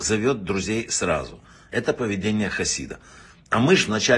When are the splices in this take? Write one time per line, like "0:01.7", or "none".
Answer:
none